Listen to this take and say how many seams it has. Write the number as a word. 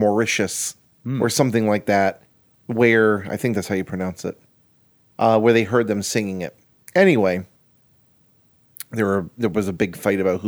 zero